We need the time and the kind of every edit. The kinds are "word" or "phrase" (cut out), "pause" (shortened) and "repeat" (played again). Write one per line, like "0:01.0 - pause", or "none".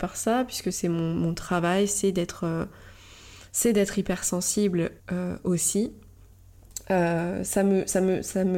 0:05.0 - pause